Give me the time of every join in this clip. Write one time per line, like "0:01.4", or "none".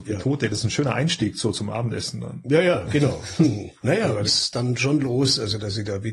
0:03.8
0:04.3